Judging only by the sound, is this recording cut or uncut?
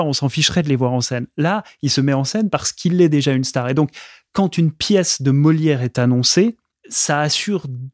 uncut